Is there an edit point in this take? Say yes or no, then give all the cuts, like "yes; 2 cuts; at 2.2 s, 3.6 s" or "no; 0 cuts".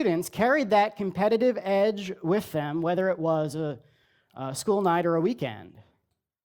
no; 0 cuts